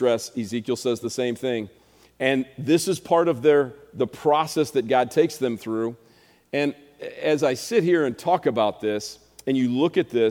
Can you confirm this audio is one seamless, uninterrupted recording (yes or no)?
yes